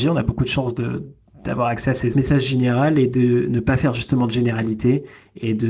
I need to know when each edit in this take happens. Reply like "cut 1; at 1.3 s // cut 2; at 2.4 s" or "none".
cut 1; at 2.1 s